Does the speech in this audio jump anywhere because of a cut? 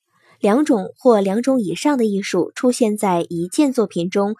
no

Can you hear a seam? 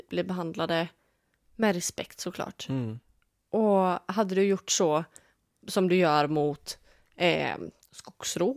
no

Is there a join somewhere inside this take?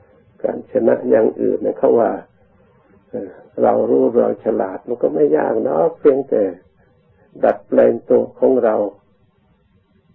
no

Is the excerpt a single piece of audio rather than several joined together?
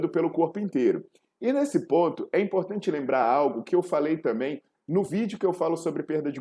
yes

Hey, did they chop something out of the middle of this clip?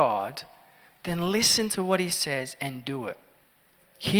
no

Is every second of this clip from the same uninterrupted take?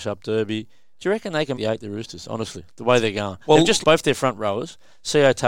no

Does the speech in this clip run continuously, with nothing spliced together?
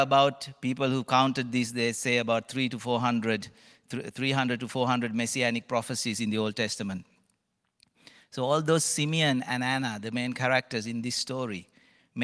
yes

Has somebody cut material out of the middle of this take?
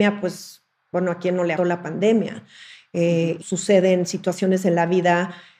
yes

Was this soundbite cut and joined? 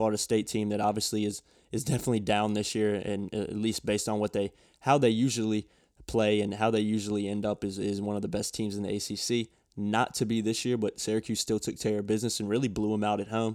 no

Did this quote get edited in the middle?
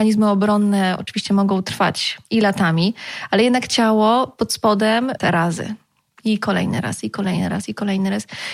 yes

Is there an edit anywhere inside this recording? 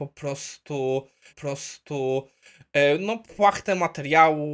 yes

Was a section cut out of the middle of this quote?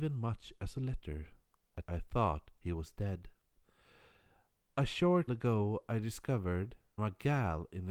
yes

